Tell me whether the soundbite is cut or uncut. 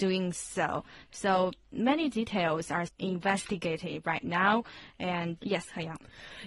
cut